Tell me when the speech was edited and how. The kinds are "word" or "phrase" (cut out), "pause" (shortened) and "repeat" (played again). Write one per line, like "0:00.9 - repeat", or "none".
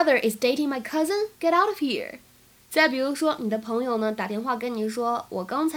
0:01.3 - pause